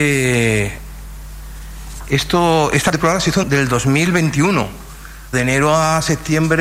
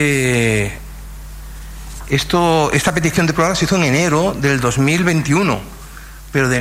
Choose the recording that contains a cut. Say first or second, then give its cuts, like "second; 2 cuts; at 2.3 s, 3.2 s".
first; 3 cuts; at 2.9 s, 3.4 s, 5.3 s